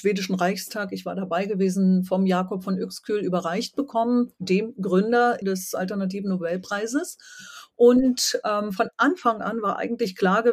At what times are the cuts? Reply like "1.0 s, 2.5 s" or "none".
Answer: 5.4 s